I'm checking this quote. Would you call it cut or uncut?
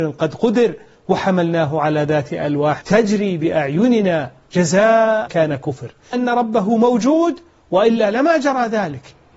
cut